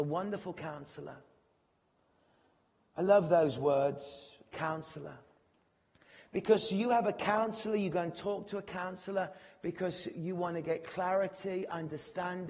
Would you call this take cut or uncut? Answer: uncut